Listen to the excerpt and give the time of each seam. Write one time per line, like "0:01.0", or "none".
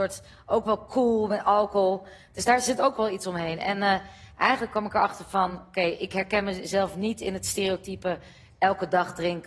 none